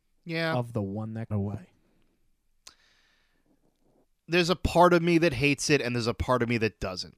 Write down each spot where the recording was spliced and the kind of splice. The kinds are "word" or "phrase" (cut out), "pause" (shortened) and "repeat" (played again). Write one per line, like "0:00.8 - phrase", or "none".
0:01.3 - word

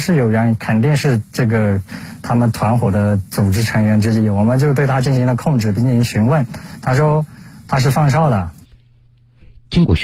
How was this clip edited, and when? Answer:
none

